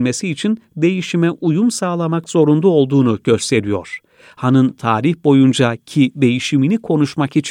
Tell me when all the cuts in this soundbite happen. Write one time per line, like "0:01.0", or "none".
none